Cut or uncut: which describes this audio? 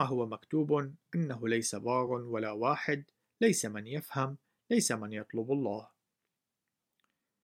uncut